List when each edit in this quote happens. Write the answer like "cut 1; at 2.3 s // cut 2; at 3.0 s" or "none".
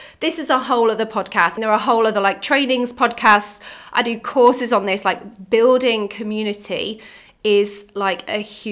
cut 1; at 1.6 s